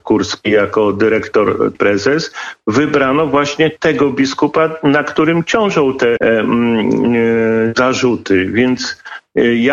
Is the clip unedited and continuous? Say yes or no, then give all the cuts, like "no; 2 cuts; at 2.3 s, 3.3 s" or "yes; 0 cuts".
no; 2 cuts; at 1.7 s, 6.2 s